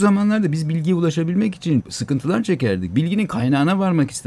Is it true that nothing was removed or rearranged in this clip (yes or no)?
no